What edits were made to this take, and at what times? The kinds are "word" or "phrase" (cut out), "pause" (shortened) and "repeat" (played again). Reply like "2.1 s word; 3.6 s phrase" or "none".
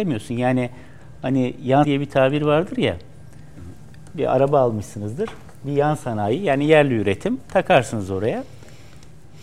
1.8 s word